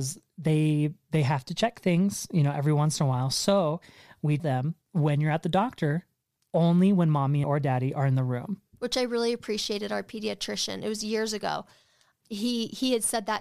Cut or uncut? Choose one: cut